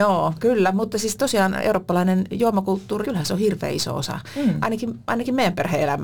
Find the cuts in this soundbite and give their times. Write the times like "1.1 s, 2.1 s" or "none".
3.0 s